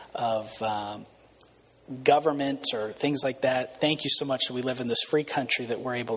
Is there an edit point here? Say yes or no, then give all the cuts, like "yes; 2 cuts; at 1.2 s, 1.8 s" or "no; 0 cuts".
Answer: no; 0 cuts